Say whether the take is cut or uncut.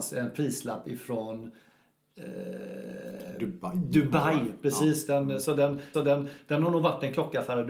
cut